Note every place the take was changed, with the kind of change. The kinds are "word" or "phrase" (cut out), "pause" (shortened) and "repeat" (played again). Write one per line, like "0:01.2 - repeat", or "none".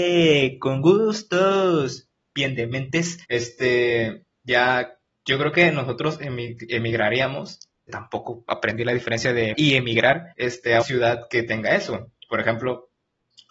0:03.2 - pause
0:05.1 - pause
0:07.9 - phrase
0:09.5 - word
0:10.3 - pause
0:10.8 - word

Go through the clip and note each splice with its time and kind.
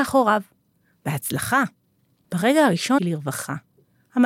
0:03.0 - word

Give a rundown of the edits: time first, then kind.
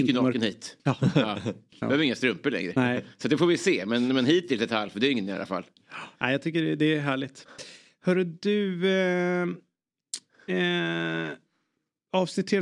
none

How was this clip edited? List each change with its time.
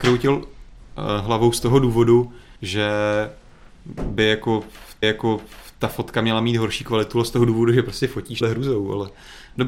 0:02.6 - pause
0:05.0 - repeat
0:08.4 - word

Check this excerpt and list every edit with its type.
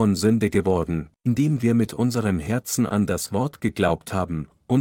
none

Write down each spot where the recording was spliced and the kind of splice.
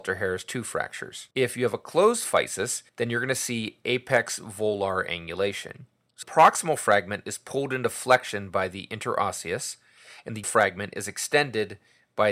0:01.3 - pause
0:02.9 - pause
0:06.2 - word
0:10.4 - word

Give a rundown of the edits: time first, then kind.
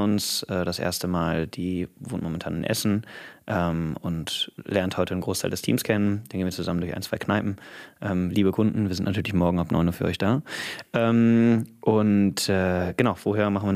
none

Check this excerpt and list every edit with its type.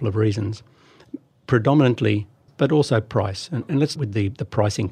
0:02.5 - word
0:04.0 - word

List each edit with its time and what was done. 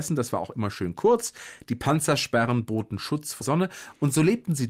0:03.4 - word

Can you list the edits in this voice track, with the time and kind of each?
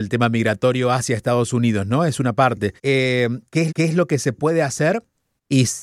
0:02.8 - pause
0:03.7 - repeat

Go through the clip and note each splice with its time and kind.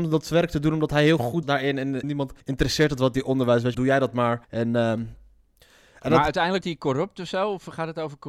0:01.4 - word
0:02.0 - word
0:02.4 - pause
0:03.7 - word
0:04.4 - pause
0:06.6 - word

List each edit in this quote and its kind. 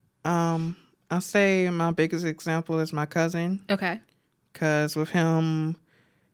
none

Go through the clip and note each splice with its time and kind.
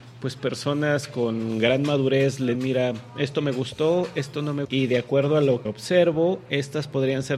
0:02.5 - word
0:04.6 - word
0:05.7 - word

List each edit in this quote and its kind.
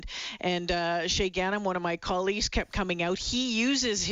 none

